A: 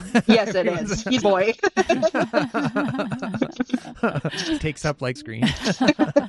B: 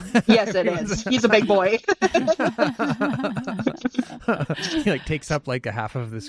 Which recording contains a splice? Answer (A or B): A